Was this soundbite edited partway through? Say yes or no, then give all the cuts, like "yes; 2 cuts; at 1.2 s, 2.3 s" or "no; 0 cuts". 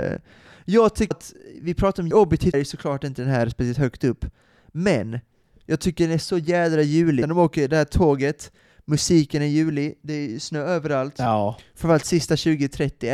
yes; 4 cuts; at 1.1 s, 2.1 s, 2.5 s, 7.2 s